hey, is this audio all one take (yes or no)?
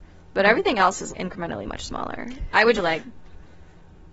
no